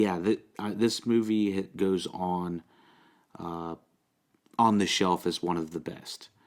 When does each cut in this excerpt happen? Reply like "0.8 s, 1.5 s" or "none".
none